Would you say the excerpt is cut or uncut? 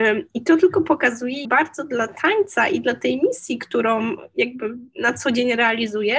cut